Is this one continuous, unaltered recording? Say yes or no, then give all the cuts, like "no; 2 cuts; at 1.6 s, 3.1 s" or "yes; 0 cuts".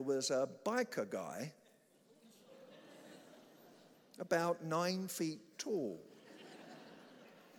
yes; 0 cuts